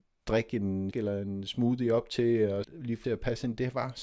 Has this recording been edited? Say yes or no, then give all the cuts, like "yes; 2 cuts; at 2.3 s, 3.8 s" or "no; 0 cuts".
yes; 3 cuts; at 0.9 s, 2.6 s, 3.0 s